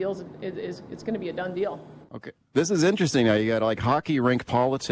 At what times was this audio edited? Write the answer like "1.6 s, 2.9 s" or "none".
2.0 s